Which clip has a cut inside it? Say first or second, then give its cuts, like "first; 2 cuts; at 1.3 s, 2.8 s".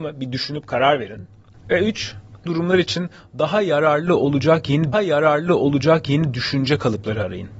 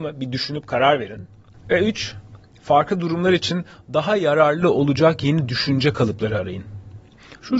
first; 2 cuts; at 2.5 s, 4.9 s